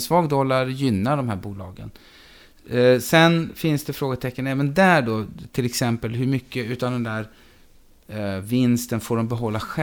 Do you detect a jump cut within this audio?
no; 0 cuts

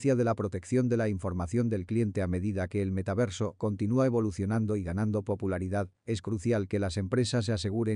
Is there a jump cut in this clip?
no; 0 cuts

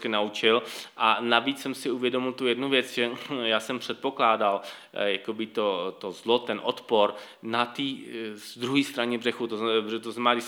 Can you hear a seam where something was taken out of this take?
no; 0 cuts

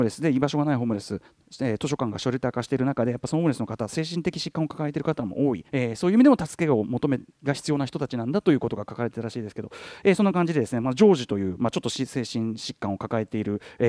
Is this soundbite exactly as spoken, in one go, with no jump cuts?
no; 1 cut; at 5.7 s

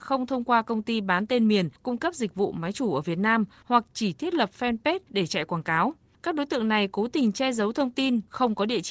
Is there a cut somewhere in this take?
no; 0 cuts

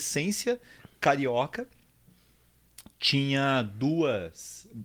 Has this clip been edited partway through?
no; 0 cuts

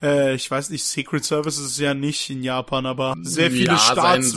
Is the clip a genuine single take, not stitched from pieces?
no; 1 cut; at 3.1 s

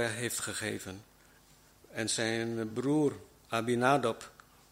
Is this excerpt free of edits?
yes; 0 cuts

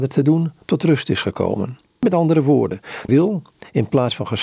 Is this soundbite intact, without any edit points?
no; 2 cuts; at 1.9 s, 3.1 s

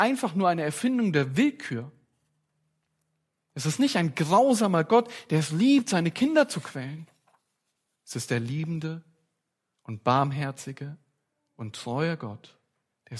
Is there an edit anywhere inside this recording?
no; 0 cuts

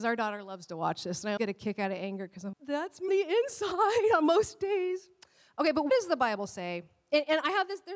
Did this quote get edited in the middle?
yes; 4 cuts; at 1.4 s, 2.5 s, 3.1 s, 5.9 s

